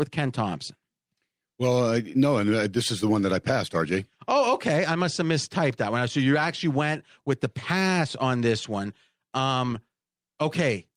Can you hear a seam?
no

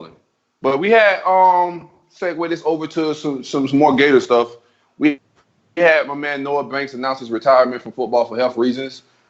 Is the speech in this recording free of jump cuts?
yes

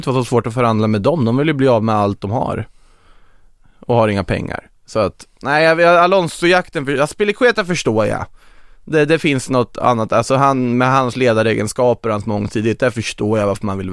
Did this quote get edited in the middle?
no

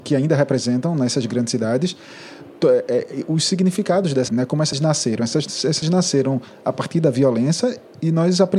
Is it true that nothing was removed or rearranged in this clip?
no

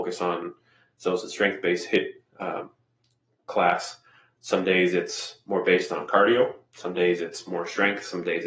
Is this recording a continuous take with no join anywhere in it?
yes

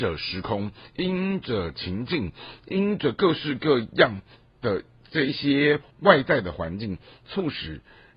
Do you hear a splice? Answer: yes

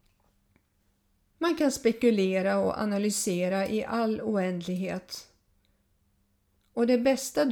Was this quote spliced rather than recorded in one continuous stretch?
no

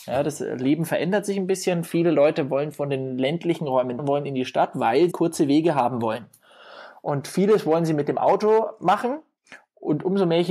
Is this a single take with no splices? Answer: no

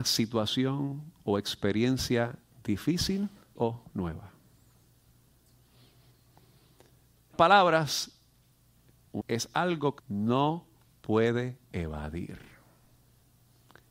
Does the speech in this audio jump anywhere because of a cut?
yes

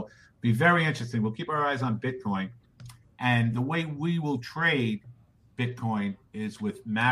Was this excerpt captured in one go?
yes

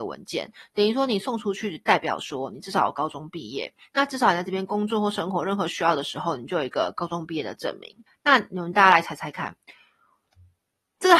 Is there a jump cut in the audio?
yes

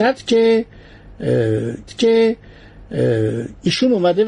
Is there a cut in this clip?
yes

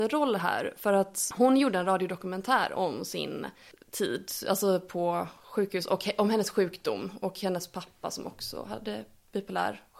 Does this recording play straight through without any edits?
yes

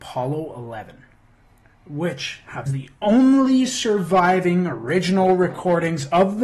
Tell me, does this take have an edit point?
yes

